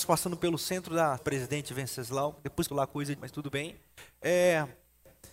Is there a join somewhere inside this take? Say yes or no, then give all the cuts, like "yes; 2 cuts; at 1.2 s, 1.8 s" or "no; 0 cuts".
yes; 3 cuts; at 1.2 s, 2.7 s, 3.2 s